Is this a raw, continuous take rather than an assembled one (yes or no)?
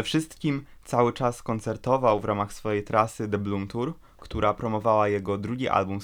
yes